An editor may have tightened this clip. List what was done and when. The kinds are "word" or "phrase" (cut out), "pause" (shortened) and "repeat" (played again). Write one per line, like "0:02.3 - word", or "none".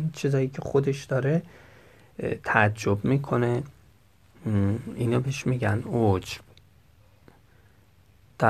none